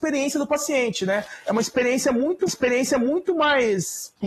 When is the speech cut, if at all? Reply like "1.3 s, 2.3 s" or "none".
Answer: 2.5 s